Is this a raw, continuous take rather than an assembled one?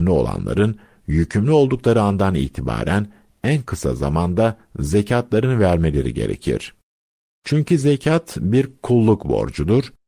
yes; 0 cuts

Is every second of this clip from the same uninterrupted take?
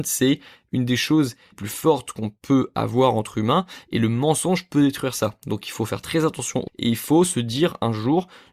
no; 2 cuts; at 1.5 s, 6.7 s

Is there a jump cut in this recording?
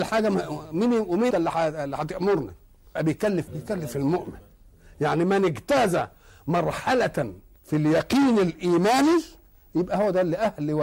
yes; 4 cuts; at 1.3 s, 3.0 s, 3.5 s, 7.6 s

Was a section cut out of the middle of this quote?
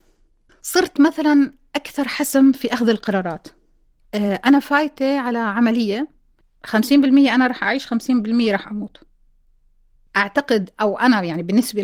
no; 0 cuts

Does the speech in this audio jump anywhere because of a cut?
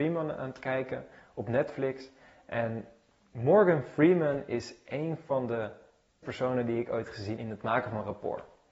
yes; 2 cuts; at 6.2 s, 7.4 s

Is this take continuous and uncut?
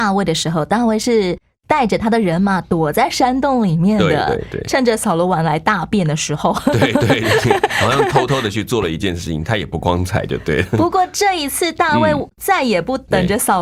no; 1 cut; at 6.9 s

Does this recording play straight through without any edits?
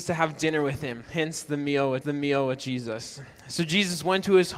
no; 2 cuts; at 1.0 s, 2.0 s

